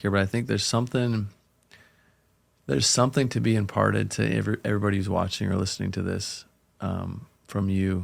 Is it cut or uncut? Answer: uncut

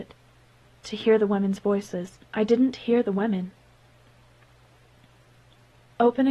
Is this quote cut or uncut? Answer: cut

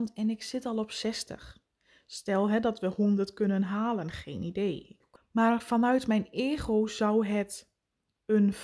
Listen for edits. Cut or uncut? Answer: uncut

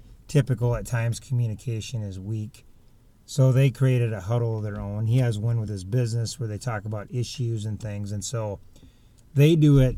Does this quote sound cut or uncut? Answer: uncut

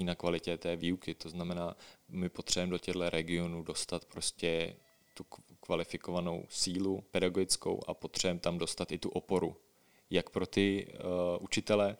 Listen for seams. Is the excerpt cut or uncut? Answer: uncut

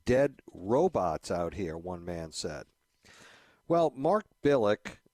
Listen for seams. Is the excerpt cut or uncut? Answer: uncut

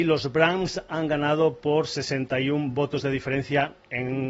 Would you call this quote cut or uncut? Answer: uncut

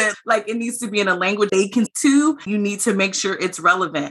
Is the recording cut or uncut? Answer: cut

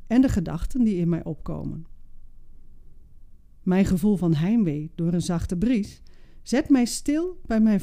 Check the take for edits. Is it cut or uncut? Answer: uncut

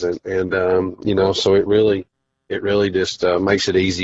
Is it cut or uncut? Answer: uncut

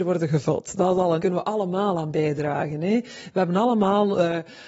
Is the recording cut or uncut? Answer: cut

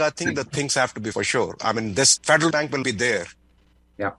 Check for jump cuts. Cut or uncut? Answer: cut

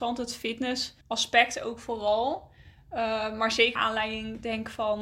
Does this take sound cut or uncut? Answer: cut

